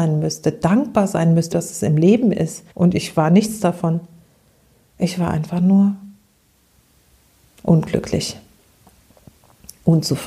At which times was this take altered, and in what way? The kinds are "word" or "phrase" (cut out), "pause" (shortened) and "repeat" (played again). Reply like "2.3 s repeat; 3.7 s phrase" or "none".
1.5 s word; 2.7 s pause

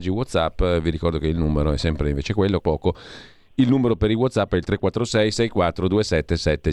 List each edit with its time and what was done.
2.6 s phrase

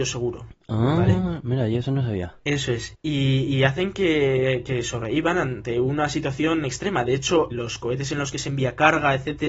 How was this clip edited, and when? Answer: 7.5 s word

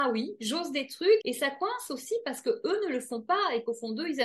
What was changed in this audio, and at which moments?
1.2 s word

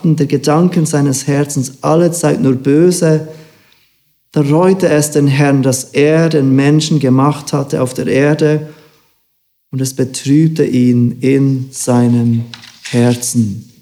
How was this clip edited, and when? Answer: none

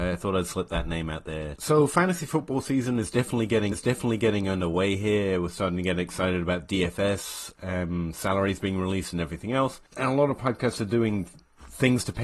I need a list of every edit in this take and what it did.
3.7 s repeat

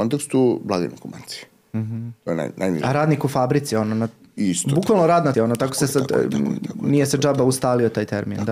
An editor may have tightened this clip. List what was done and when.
5.3 s word

